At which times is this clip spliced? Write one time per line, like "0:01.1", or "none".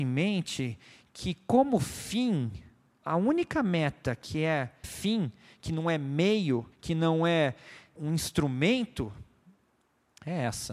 0:04.8
0:06.7
0:08.0